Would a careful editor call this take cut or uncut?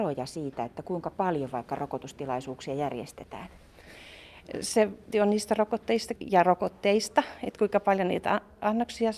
cut